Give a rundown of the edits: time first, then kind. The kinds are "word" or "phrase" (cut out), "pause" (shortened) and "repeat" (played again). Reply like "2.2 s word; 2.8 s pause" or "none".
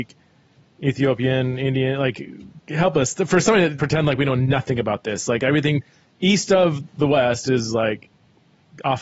3.8 s word